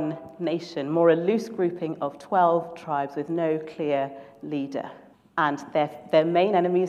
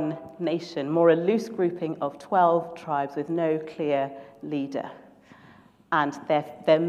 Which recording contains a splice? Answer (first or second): first